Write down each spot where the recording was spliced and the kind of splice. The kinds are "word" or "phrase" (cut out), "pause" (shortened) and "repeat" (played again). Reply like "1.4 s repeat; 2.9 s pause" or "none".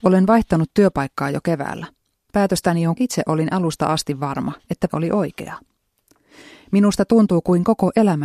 3.0 s phrase; 4.9 s word